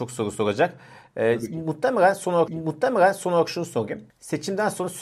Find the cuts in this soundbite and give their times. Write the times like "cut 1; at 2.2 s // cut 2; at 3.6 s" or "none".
cut 1; at 2.5 s // cut 2; at 4.1 s